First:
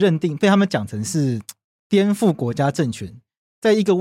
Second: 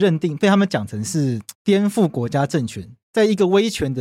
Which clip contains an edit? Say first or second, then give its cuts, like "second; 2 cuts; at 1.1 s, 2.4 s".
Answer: second; 2 cuts; at 1.5 s, 3.0 s